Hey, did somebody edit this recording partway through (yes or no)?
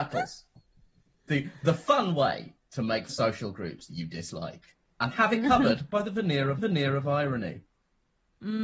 yes